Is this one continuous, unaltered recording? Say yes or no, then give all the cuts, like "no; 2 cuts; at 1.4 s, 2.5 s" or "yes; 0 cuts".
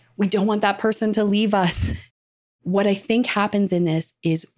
yes; 0 cuts